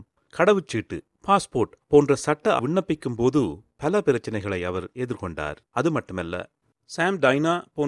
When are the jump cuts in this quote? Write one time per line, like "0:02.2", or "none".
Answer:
0:02.6
0:05.7